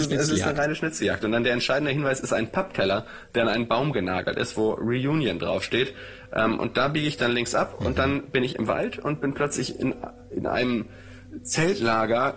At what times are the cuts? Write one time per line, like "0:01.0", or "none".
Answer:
none